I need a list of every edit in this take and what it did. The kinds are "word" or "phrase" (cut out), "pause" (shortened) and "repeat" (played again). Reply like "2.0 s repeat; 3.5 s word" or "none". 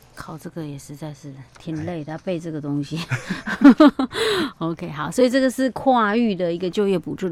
1.5 s pause